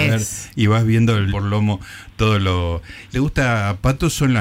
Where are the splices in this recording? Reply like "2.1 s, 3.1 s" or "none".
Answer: 1.3 s, 3.1 s